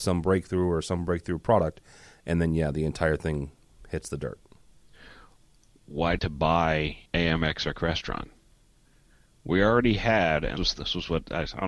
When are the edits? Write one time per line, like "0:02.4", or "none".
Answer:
0:06.2
0:07.1
0:10.6